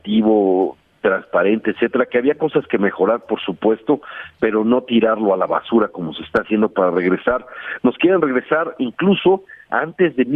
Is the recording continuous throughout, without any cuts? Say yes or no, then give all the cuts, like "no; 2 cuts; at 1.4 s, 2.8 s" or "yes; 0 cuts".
yes; 0 cuts